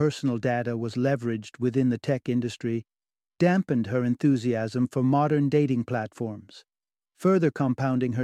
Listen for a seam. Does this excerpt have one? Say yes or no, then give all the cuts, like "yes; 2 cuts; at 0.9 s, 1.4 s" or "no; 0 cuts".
no; 0 cuts